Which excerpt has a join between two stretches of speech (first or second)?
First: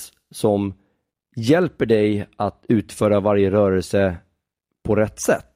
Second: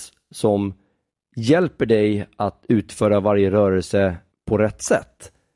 second